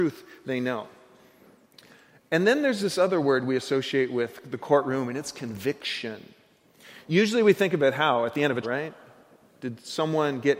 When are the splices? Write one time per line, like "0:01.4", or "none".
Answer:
0:08.6